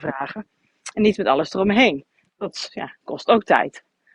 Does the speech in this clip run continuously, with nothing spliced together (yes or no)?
yes